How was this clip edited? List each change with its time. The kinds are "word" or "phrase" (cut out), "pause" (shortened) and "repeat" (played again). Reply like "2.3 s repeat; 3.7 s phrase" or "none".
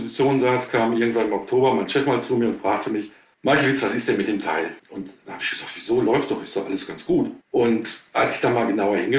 3.3 s pause; 4.8 s pause; 7.4 s pause